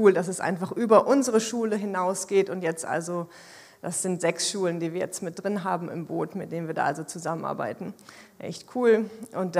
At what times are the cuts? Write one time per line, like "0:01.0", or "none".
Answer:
none

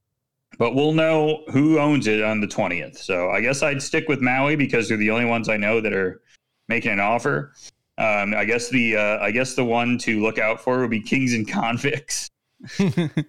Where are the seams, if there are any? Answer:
none

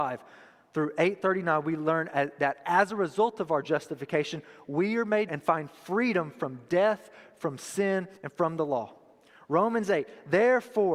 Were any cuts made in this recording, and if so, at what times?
0:05.3
0:08.2

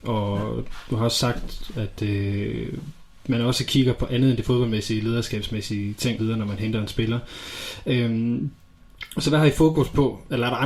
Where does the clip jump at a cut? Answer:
0:06.2

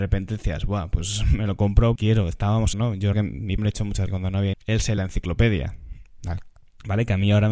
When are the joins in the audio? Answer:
0:02.0
0:02.7
0:03.1
0:03.6
0:04.1
0:04.5
0:05.0

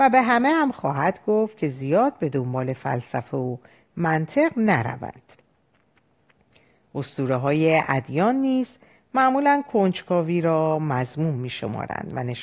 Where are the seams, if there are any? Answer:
none

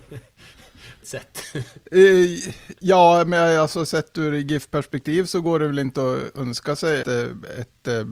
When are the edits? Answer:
0:01.0
0:07.0

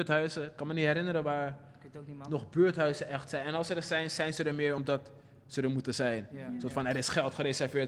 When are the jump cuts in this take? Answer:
none

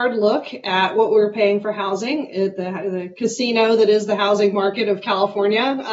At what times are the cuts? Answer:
none

